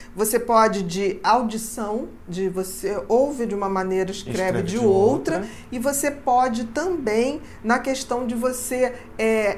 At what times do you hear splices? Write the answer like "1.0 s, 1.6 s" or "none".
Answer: none